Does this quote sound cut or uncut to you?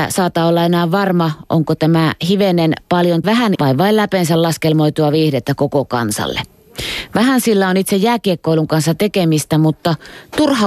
cut